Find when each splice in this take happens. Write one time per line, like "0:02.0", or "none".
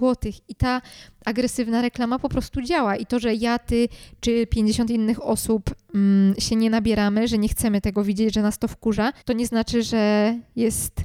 0:09.2